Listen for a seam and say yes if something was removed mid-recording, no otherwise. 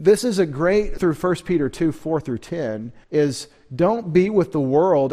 yes